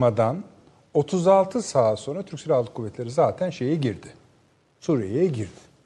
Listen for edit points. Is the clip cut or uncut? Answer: uncut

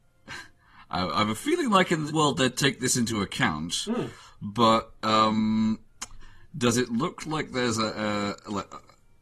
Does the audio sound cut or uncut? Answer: cut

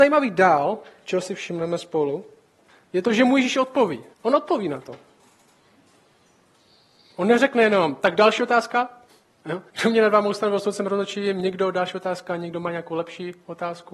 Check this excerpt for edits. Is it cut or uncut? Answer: cut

